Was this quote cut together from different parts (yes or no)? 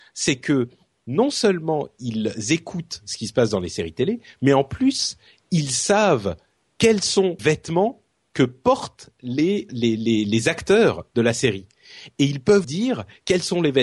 yes